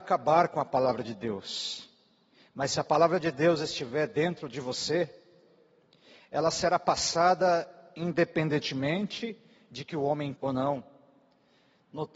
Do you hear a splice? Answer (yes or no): yes